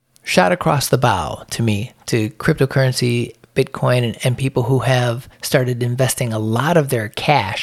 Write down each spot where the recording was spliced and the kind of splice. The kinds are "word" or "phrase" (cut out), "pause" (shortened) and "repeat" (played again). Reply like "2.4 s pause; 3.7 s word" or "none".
5.3 s pause